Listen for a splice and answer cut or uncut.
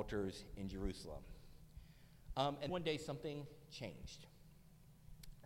cut